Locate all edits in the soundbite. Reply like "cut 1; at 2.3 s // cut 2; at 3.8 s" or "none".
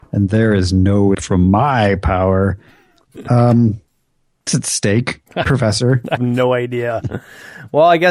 cut 1; at 1.1 s // cut 2; at 4.5 s // cut 3; at 5.3 s // cut 4; at 6.2 s